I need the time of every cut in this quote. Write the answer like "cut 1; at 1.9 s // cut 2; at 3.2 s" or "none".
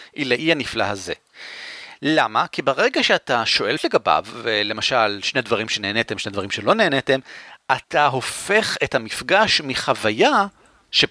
cut 1; at 3.8 s // cut 2; at 7.8 s

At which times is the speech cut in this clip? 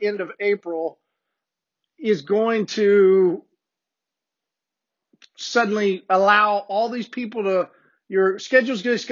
none

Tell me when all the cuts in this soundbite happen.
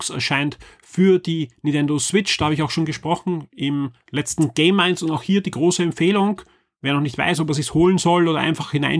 none

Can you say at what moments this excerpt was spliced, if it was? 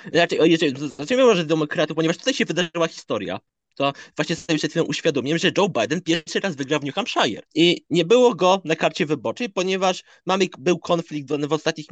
cut 1; at 7.5 s

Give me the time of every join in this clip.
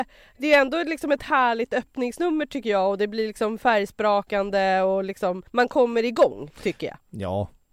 cut 1; at 5.5 s

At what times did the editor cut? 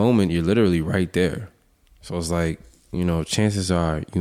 none

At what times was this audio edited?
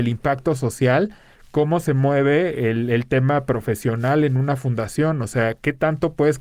none

